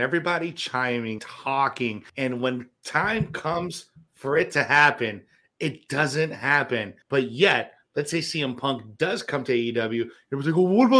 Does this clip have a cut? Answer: yes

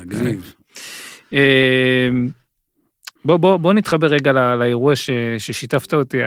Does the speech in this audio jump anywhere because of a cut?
yes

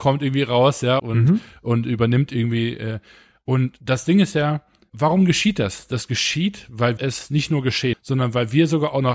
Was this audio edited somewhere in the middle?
yes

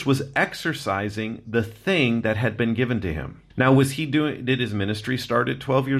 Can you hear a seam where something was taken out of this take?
yes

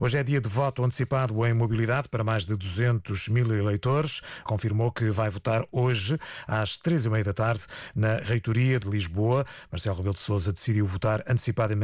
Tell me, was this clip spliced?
yes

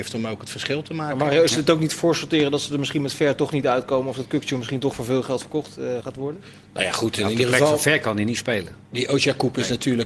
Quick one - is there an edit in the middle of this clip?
no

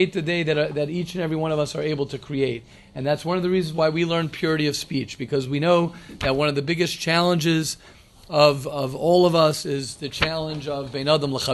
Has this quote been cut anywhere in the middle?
no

